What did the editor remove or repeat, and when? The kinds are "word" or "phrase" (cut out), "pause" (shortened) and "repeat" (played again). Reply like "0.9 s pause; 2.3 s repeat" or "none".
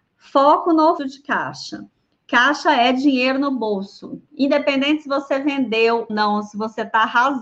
1.0 s word; 4.3 s pause; 6.1 s word